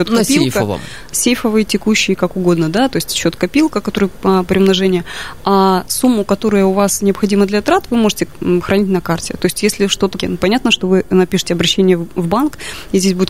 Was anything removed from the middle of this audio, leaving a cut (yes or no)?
yes